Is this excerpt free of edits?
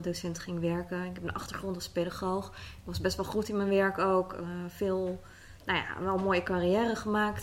yes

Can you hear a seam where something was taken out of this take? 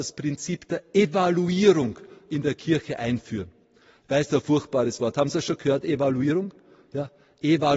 yes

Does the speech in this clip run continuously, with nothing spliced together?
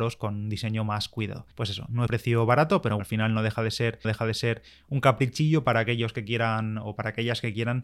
no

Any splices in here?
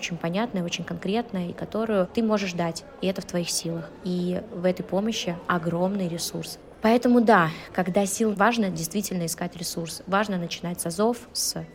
yes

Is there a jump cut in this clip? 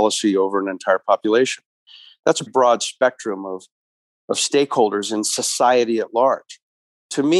yes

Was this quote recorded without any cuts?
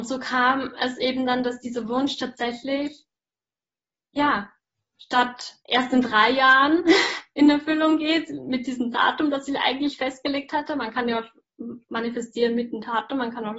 no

